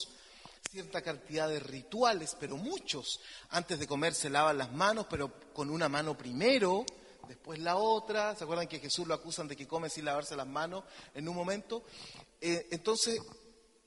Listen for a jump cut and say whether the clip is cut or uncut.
uncut